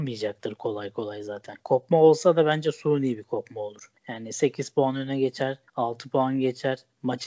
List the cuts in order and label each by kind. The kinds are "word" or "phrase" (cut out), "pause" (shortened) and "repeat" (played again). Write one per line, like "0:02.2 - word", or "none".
0:04.0 - pause
0:05.7 - pause